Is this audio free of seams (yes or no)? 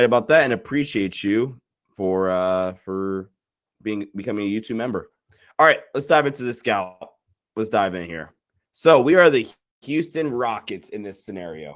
yes